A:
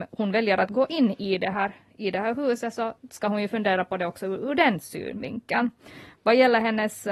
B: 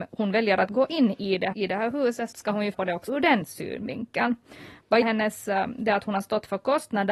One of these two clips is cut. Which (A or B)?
B